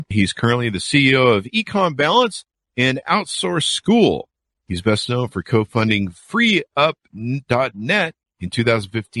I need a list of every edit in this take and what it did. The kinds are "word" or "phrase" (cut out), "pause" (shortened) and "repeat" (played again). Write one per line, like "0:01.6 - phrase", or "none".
none